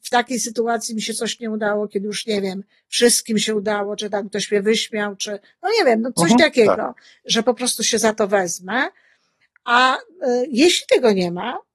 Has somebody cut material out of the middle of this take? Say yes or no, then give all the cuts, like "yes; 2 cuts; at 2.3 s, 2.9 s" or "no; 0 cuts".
no; 0 cuts